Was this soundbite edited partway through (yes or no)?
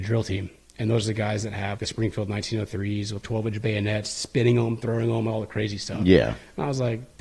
yes